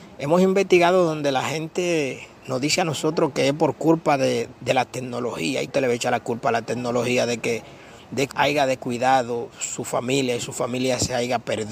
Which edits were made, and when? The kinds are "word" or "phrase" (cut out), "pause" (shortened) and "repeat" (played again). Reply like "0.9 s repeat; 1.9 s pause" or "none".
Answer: 2.4 s pause; 4.5 s word; 5.7 s word; 8.3 s word